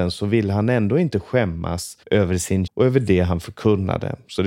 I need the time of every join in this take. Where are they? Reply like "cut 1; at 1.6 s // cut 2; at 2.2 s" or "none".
cut 1; at 2.0 s // cut 2; at 2.7 s